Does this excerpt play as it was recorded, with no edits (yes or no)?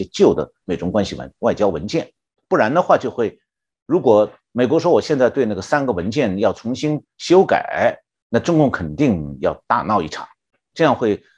yes